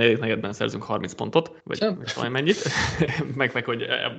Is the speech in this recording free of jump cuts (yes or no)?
no